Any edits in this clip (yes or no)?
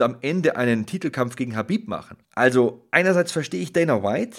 yes